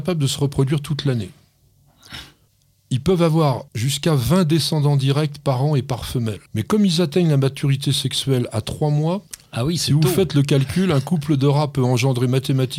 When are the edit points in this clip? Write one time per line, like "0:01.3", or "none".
0:02.5
0:03.7
0:06.5
0:09.3